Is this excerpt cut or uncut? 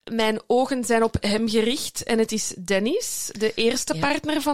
uncut